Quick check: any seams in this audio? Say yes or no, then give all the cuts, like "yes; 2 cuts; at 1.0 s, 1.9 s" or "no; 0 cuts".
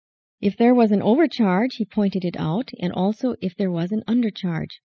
no; 0 cuts